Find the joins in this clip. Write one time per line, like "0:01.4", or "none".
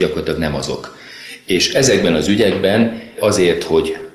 none